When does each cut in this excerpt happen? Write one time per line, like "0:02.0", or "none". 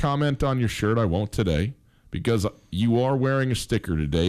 none